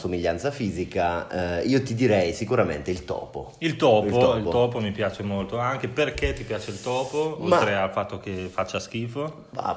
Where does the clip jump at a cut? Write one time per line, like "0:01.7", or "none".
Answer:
none